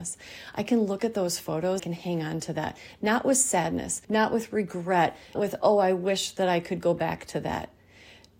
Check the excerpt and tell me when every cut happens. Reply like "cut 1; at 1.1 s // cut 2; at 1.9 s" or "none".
cut 1; at 1.8 s // cut 2; at 4.0 s // cut 3; at 5.4 s